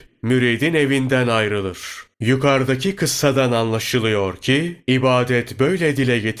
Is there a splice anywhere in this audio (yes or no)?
yes